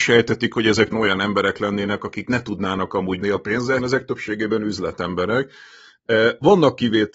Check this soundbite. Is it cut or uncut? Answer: cut